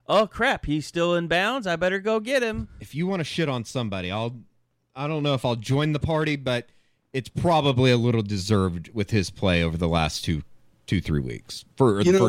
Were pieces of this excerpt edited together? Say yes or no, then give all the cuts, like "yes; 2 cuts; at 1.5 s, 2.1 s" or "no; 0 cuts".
no; 0 cuts